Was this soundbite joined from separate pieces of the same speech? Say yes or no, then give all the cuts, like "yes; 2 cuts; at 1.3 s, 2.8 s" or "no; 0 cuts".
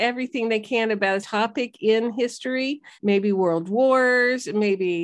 yes; 2 cuts; at 1.2 s, 2.9 s